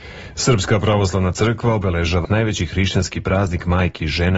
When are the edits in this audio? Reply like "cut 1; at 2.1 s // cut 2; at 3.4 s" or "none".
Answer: cut 1; at 2.2 s